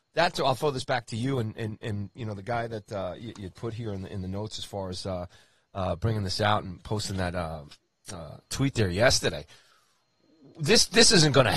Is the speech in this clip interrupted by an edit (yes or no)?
no